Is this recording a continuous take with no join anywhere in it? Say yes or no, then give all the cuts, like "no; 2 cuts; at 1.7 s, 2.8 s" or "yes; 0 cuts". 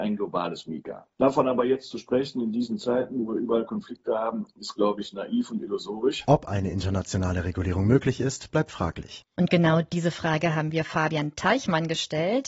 yes; 0 cuts